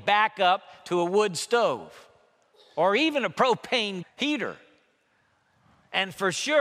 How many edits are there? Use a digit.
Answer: 1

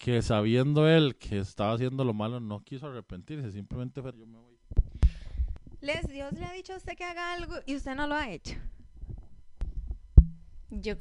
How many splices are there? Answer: 1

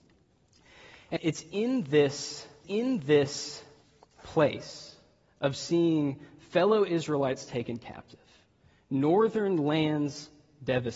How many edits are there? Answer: 2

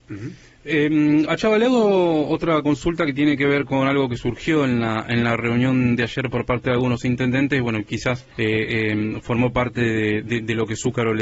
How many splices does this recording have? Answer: 2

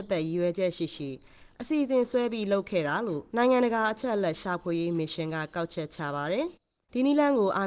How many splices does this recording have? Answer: 2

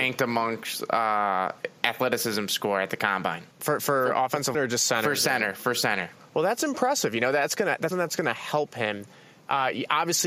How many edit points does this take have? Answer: 3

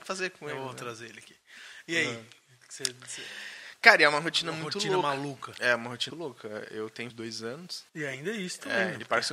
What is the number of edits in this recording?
3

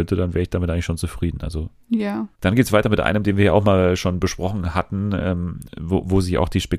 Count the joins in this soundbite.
1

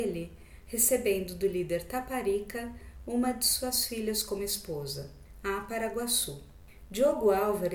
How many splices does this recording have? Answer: 0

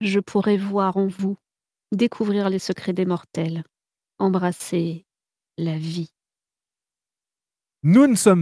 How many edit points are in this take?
0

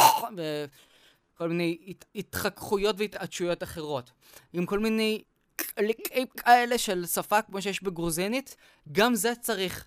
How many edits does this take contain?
1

